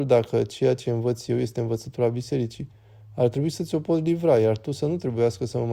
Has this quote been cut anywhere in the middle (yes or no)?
no